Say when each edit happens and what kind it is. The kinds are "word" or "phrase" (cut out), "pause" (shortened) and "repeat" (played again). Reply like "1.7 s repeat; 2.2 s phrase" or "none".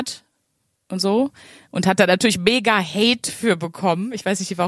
none